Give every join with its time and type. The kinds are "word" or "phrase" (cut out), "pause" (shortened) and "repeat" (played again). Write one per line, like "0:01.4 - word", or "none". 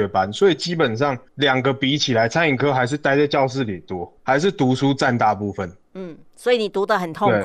0:01.3 - pause
0:04.2 - pause